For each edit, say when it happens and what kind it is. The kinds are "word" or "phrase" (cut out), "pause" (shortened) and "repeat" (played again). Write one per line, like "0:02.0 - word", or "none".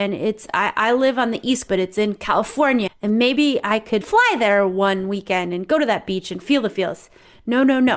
0:01.7 - word
0:02.9 - word
0:04.0 - word